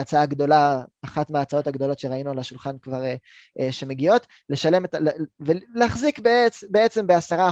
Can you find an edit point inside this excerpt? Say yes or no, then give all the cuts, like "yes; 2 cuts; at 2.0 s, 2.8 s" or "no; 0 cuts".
no; 0 cuts